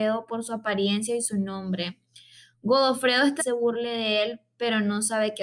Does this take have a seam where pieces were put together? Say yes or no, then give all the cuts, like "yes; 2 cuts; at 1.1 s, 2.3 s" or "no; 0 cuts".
yes; 1 cut; at 3.4 s